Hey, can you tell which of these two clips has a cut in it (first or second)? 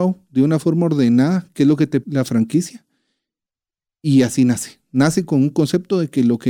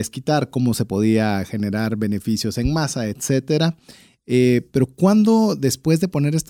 first